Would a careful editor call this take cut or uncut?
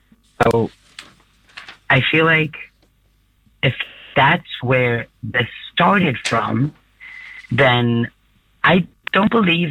uncut